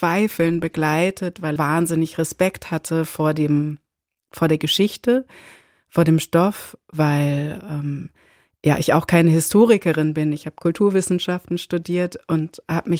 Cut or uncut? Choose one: cut